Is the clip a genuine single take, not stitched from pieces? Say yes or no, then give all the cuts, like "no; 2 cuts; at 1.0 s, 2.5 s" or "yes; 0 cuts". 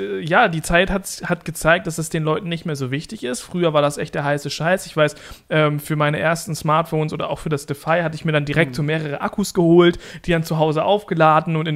yes; 0 cuts